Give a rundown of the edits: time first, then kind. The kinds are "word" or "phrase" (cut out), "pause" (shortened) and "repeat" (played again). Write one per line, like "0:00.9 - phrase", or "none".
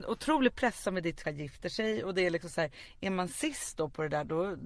0:01.2 - phrase